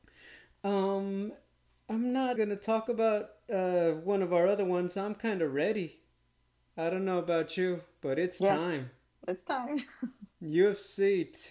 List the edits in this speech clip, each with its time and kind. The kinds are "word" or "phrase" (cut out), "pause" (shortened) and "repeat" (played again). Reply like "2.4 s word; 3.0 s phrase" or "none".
2.4 s word